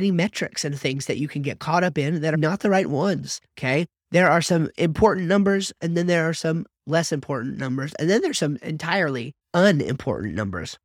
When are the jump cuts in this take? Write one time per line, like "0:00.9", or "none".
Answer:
0:02.3
0:03.5
0:09.4